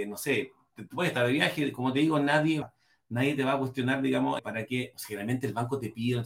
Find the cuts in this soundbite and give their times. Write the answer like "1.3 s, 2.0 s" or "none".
2.6 s, 4.4 s